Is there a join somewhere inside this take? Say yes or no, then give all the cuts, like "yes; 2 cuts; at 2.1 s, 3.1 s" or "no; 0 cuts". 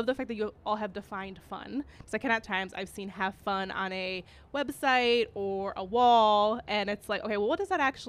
yes; 1 cut; at 2.4 s